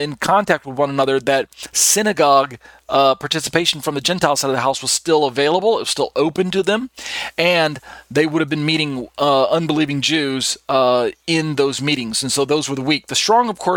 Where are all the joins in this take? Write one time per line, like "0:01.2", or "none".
none